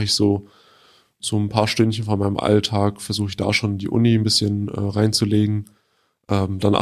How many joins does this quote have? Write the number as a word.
zero